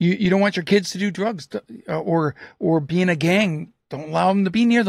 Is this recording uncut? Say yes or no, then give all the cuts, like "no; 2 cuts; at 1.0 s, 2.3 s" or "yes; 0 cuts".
yes; 0 cuts